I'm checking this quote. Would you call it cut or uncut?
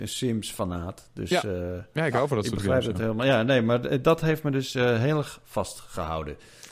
uncut